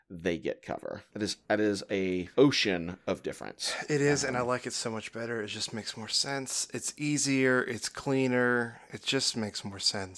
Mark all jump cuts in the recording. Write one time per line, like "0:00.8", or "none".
0:01.1
0:01.4
0:02.3